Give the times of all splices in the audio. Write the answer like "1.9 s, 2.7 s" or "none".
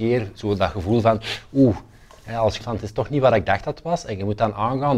2.6 s